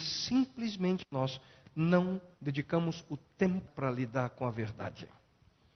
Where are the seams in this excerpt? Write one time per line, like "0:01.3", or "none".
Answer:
0:02.3
0:03.7